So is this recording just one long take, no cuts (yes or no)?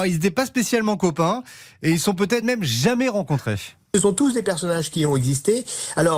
yes